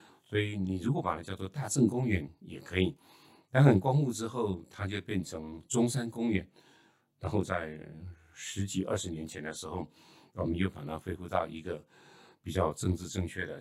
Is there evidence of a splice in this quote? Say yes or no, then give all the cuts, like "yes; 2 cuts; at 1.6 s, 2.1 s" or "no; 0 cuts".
no; 0 cuts